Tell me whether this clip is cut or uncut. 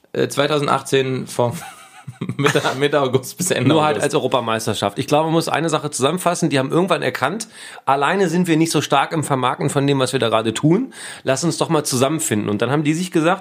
uncut